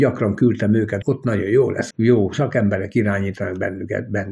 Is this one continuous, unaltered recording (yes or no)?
no